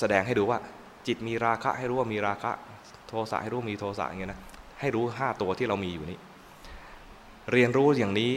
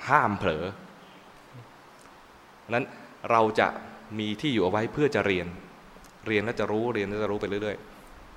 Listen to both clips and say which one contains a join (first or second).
first